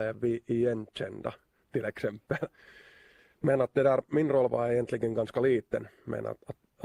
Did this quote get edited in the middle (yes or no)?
no